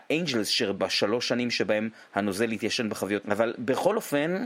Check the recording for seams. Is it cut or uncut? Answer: cut